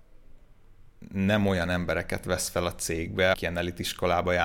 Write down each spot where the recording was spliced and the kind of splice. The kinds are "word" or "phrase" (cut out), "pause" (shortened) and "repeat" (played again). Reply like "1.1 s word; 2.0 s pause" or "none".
3.3 s word